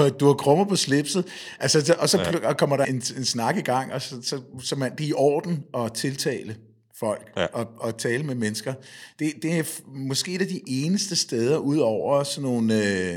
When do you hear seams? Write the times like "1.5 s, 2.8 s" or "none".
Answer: 2.8 s